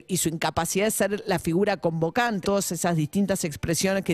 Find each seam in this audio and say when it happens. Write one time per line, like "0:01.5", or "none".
0:02.4